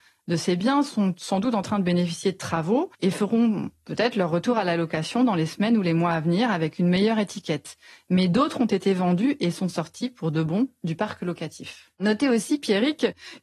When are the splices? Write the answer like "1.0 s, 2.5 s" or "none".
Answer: 2.9 s